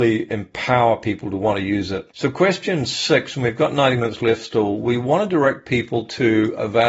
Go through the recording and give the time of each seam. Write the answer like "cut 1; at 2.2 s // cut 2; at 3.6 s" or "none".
cut 1; at 2.1 s